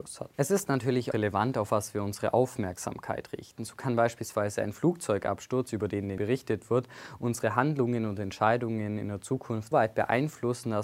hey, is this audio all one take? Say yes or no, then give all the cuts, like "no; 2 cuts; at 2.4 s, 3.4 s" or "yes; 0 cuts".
no; 3 cuts; at 1.1 s, 6.2 s, 9.7 s